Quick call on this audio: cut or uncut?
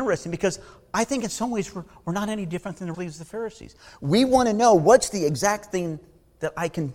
cut